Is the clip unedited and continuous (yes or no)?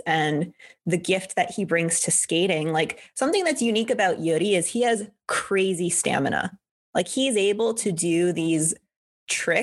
yes